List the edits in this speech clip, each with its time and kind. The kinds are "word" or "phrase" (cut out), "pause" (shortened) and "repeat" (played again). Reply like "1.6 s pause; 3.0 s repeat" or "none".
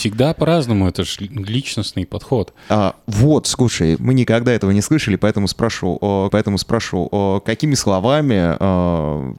4.0 s word; 6.3 s repeat

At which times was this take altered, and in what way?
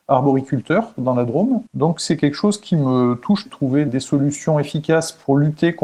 1.7 s pause; 3.5 s phrase; 3.9 s word

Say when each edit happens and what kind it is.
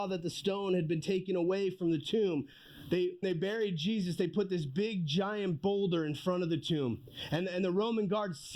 3.2 s word

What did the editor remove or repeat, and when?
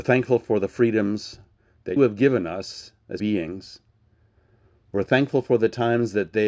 2.0 s word; 3.2 s word

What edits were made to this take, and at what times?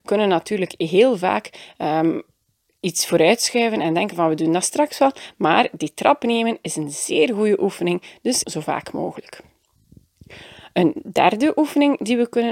8.4 s phrase

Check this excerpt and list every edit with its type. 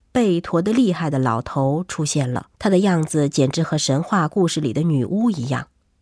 2.5 s pause

